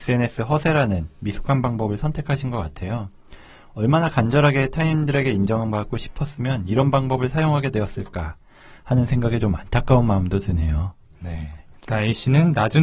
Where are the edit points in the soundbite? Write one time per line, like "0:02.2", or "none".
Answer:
none

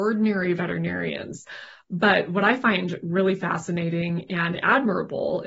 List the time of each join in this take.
none

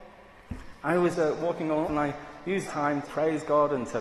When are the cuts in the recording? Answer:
0:01.1
0:01.8
0:02.7
0:03.0

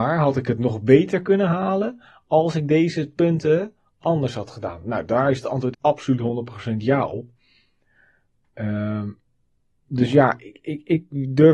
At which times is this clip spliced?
0:05.7

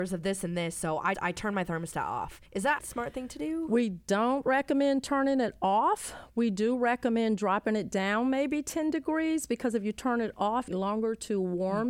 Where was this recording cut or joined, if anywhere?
0:01.1
0:02.5
0:02.8
0:10.7

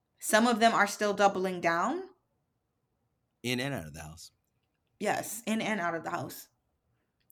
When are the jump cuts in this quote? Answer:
none

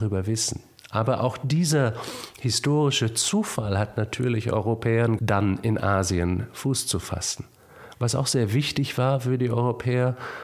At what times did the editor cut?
0:05.2

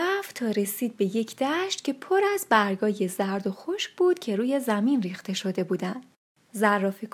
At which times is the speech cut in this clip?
none

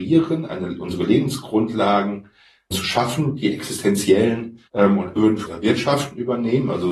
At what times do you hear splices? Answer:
0:02.7
0:04.7
0:05.2
0:05.5

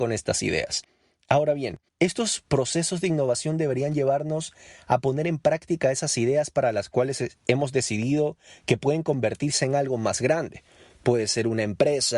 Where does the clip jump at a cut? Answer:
0:01.9

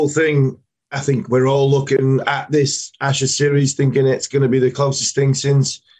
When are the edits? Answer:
none

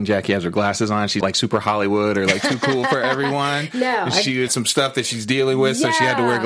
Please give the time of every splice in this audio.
0:01.2
0:04.5

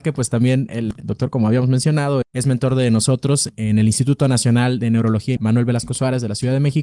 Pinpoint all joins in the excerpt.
0:02.2
0:05.4

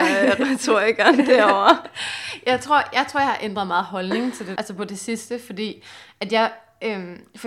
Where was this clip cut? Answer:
0:04.6

